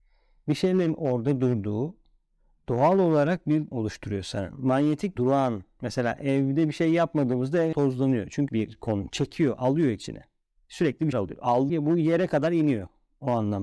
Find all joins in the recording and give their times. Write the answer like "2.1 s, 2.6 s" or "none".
3.7 s, 5.2 s, 7.7 s, 8.5 s, 11.1 s, 11.7 s